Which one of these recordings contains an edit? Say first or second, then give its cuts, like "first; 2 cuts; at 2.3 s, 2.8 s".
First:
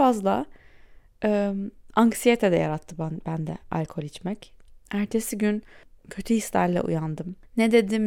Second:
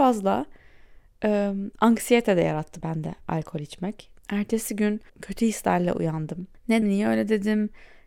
second; 5 cuts; at 1.7 s, 2.8 s, 4.2 s, 5.1 s, 6.8 s